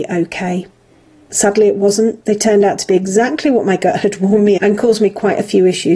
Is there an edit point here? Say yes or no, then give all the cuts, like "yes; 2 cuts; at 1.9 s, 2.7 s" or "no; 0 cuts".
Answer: yes; 1 cut; at 4.6 s